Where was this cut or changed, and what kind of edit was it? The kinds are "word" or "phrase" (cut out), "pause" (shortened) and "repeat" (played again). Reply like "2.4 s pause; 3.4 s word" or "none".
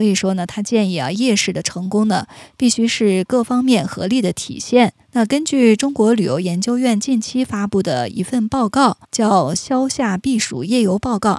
5.0 s pause; 9.0 s pause